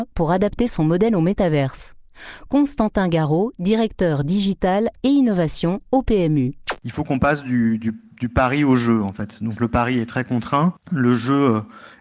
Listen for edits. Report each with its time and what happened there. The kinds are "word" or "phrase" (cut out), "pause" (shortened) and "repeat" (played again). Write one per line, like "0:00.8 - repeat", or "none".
none